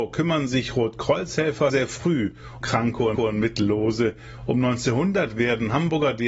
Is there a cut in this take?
yes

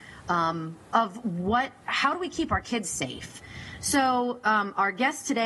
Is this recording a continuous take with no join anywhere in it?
yes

